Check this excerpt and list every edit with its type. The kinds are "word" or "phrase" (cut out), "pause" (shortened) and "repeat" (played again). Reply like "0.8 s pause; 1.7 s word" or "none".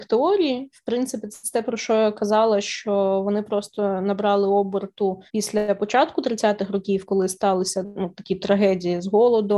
5.3 s pause